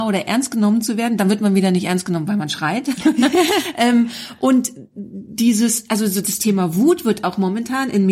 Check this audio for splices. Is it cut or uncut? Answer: uncut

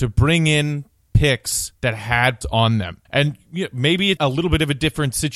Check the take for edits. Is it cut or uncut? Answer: cut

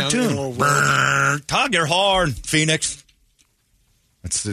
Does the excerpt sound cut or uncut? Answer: uncut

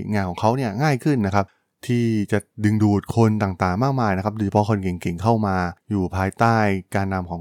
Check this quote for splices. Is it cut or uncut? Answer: uncut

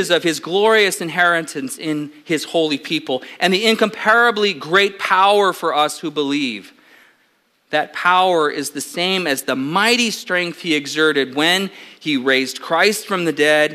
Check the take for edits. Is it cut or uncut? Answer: uncut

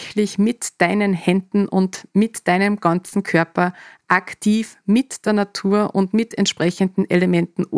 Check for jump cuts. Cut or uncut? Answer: uncut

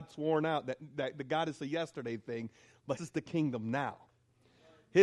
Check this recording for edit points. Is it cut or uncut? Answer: cut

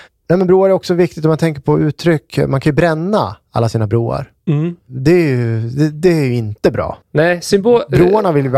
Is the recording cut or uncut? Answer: cut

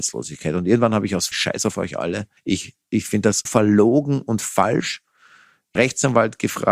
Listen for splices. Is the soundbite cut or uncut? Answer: cut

